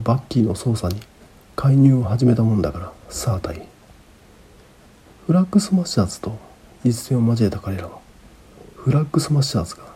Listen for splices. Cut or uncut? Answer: uncut